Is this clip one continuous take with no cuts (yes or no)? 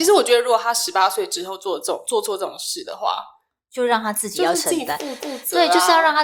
no